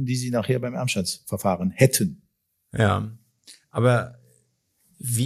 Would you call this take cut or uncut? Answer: uncut